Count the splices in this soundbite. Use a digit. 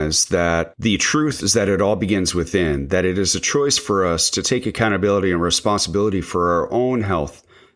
1